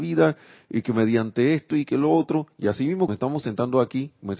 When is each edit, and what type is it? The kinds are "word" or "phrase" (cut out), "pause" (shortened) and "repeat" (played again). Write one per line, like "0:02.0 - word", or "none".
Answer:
0:03.1 - word